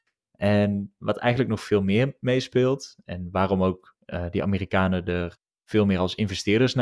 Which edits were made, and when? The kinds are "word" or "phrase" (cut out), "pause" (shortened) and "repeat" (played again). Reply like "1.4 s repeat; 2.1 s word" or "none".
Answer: none